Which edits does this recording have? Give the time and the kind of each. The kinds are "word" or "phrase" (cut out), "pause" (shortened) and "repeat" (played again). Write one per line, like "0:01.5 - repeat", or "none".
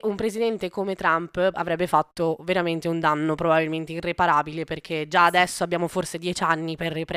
0:01.5 - word